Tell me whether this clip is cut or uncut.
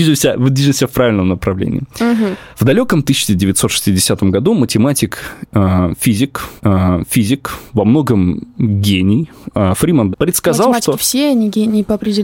cut